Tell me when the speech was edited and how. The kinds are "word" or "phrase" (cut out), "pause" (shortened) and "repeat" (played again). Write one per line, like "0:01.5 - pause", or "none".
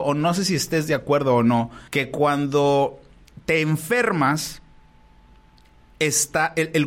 0:01.9 - pause